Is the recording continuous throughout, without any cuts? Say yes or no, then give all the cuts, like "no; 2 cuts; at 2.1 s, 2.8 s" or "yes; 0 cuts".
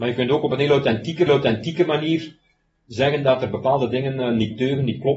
no; 1 cut; at 1.3 s